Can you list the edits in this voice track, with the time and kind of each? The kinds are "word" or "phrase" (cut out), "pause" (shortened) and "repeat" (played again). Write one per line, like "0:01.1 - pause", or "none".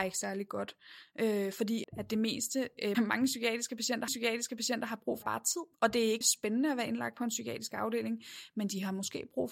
0:01.8 - word
0:02.9 - word
0:04.1 - repeat
0:05.2 - word
0:05.7 - pause
0:06.2 - word